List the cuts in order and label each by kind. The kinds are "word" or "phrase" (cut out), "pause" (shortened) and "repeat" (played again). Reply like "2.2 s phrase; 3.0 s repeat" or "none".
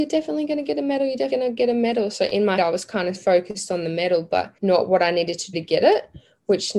1.3 s word; 2.6 s word; 3.1 s word; 4.6 s pause; 5.5 s word